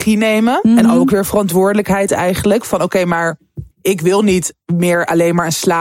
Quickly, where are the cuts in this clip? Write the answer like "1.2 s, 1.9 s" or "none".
3.7 s